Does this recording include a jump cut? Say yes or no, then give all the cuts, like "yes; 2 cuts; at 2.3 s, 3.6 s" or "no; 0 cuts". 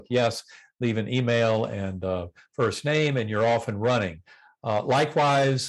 no; 0 cuts